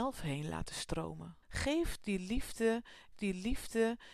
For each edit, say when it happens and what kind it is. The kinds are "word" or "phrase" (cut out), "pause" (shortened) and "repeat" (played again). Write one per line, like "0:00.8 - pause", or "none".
0:01.4 - pause
0:03.1 - repeat